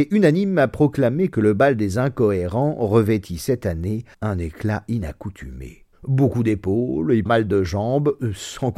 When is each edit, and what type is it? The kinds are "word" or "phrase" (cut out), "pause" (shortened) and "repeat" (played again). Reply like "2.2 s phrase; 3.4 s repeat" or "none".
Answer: 4.1 s pause; 5.9 s pause; 7.3 s word